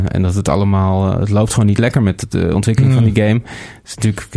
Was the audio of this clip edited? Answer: no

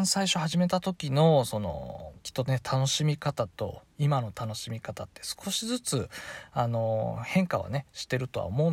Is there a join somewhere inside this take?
no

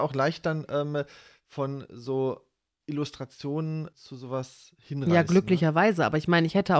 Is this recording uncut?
yes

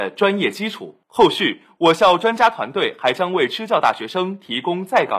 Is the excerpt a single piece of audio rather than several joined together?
no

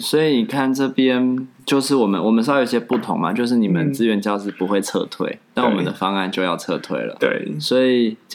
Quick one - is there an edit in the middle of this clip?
yes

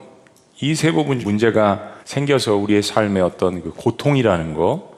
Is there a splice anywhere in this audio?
yes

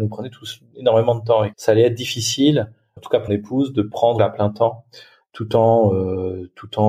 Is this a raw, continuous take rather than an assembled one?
no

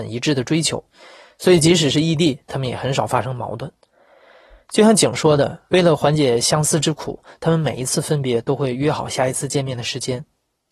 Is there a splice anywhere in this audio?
no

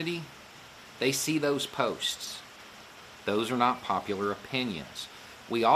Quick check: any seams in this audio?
no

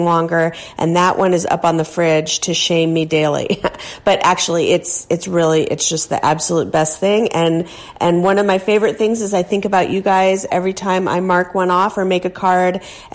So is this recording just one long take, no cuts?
yes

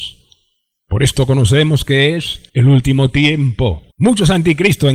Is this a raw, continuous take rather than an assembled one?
no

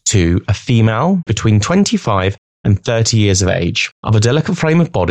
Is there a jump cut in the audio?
yes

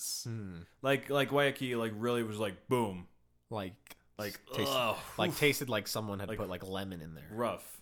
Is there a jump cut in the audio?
no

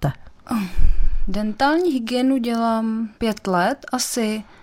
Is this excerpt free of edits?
no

